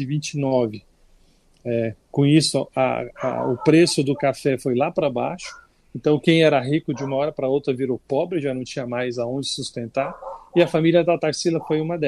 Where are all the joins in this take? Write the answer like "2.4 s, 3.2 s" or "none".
none

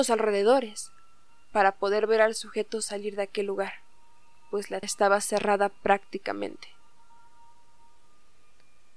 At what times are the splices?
4.8 s

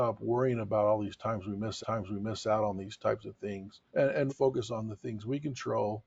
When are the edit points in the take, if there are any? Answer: 1.8 s, 3.9 s, 4.3 s

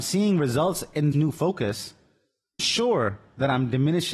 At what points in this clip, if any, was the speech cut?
1.1 s, 2.6 s

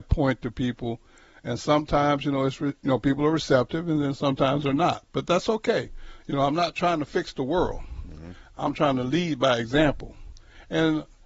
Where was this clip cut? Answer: none

